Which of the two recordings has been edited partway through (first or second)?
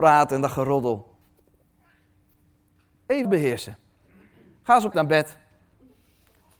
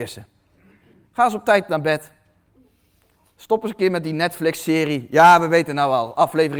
first